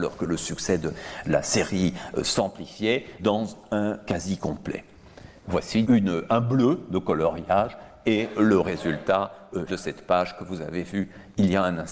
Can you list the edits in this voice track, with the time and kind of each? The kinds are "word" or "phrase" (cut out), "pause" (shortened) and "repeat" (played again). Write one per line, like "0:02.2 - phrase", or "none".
0:03.2 - word
0:04.1 - word
0:05.8 - word
0:09.7 - word